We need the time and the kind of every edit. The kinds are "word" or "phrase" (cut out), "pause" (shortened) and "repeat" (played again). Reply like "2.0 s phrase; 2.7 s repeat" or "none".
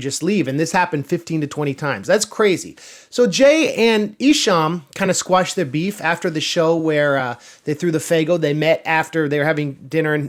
none